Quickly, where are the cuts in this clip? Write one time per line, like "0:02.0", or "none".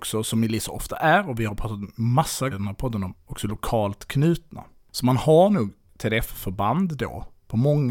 0:02.5